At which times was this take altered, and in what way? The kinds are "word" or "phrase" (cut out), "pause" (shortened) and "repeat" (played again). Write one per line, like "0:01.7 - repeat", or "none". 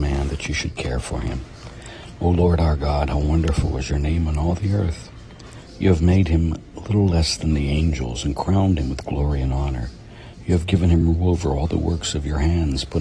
none